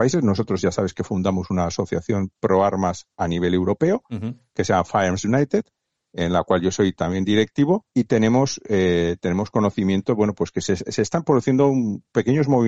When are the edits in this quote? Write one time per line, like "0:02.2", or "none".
0:03.1
0:07.9